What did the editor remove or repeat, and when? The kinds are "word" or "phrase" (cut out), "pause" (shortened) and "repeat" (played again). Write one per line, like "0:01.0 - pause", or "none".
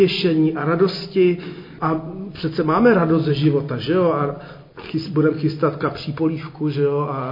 0:04.7 - pause